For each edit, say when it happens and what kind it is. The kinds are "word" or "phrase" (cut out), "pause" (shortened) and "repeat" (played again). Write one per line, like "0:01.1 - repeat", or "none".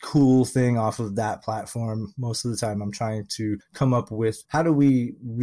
0:04.5 - pause